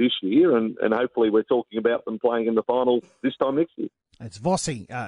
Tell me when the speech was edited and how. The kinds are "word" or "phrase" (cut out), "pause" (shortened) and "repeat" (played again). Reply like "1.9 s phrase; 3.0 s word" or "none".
none